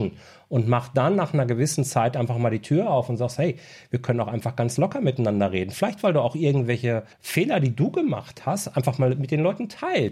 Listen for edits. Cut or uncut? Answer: cut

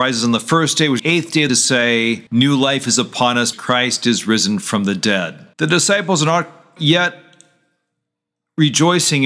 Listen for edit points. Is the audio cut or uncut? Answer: cut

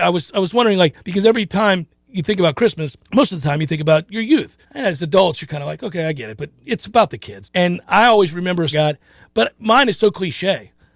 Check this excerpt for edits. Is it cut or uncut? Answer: cut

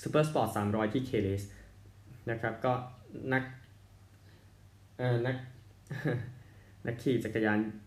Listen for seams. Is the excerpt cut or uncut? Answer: uncut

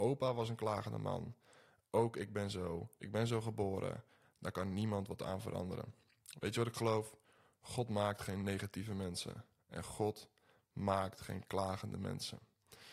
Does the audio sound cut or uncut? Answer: uncut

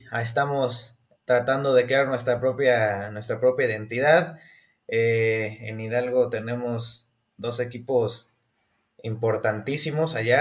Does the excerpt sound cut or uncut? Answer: uncut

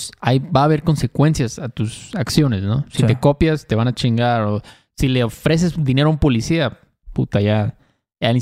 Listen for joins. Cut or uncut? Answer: uncut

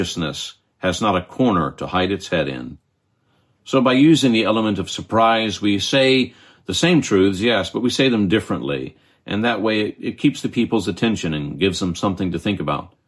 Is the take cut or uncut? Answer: uncut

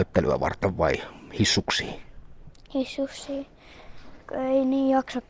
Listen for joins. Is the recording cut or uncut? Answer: cut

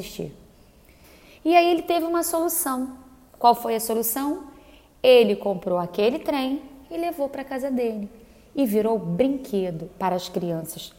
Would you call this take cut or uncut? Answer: uncut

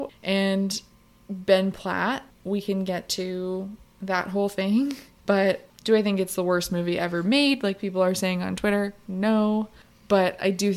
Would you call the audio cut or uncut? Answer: uncut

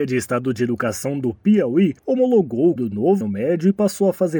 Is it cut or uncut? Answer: cut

